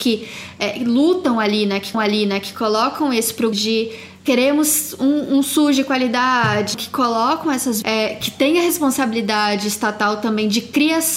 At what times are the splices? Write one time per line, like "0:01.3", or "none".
0:01.9
0:03.5
0:04.2
0:06.7
0:07.8